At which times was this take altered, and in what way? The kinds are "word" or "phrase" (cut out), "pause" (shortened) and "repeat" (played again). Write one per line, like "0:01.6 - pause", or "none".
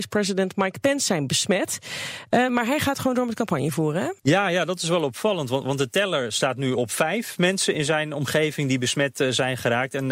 0:04.2 - pause